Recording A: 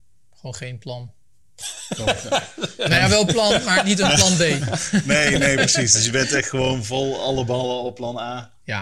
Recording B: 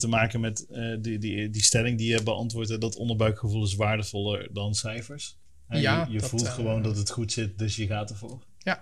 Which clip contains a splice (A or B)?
B